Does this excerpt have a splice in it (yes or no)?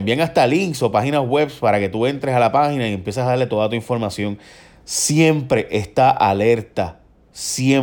no